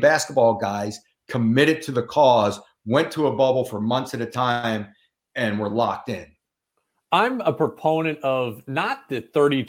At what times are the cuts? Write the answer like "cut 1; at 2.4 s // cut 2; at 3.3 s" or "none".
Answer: none